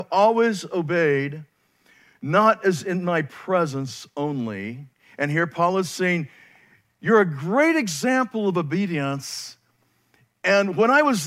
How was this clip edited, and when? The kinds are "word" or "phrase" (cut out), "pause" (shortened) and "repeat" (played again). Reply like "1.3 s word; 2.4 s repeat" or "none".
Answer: none